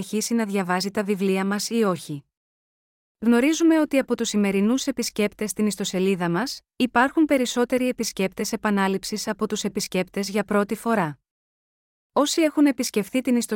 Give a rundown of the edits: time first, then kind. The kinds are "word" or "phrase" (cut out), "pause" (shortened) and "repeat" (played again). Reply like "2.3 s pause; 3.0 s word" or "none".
none